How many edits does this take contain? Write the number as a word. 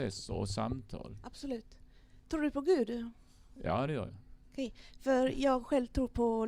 zero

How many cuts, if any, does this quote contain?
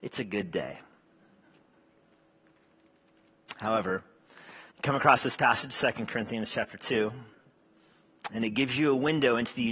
one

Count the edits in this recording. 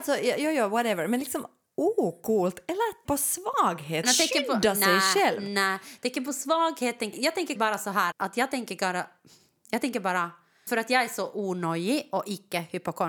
six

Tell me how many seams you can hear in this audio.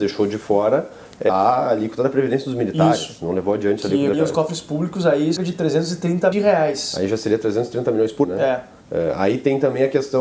six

